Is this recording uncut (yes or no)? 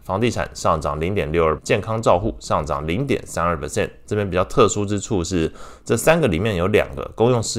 no